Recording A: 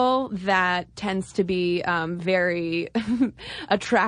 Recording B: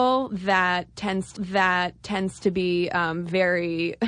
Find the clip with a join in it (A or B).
B